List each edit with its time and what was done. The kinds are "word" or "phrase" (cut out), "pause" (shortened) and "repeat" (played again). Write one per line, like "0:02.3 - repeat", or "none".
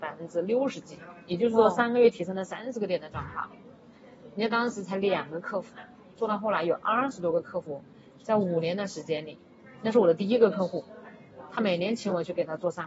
none